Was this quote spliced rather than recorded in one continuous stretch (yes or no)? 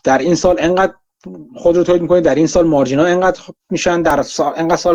no